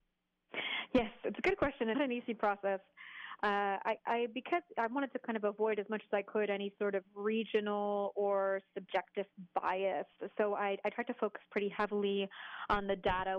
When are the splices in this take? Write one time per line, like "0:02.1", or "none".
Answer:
0:01.9